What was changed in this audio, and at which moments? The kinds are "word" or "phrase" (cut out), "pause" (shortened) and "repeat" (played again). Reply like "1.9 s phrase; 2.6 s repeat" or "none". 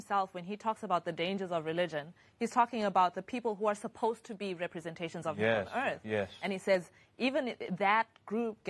none

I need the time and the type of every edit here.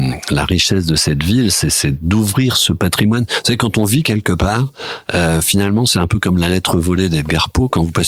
none

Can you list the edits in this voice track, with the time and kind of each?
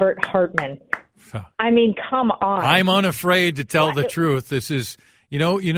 1.5 s pause

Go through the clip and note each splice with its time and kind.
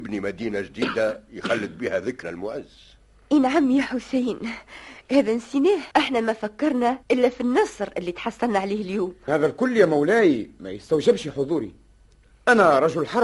2.2 s word; 5.9 s pause; 7.0 s pause; 9.3 s word

